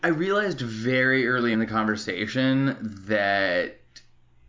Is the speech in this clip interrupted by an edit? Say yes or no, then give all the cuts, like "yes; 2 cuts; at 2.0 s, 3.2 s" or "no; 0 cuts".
yes; 1 cut; at 1.5 s